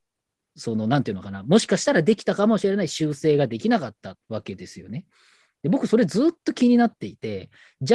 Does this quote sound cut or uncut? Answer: cut